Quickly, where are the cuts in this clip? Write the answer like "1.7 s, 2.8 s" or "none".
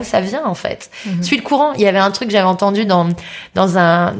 none